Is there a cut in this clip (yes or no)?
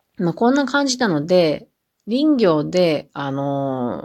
no